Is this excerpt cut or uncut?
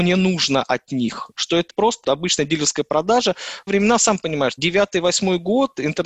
cut